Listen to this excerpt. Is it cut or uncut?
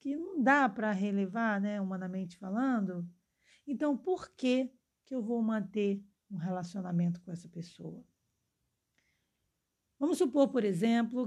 uncut